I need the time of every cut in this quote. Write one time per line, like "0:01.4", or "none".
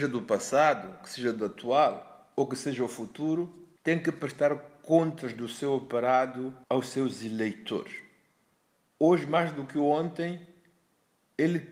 0:03.8
0:06.6
0:08.5